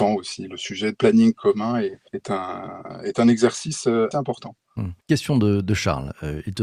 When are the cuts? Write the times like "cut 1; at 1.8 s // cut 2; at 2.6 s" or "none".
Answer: cut 1; at 0.9 s // cut 2; at 2.1 s // cut 3; at 4.1 s // cut 4; at 5.0 s